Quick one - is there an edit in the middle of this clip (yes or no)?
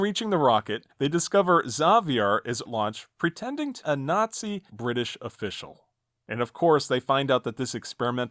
yes